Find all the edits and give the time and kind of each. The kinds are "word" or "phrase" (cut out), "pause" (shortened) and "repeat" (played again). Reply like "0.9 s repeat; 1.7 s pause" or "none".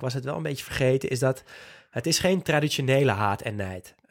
none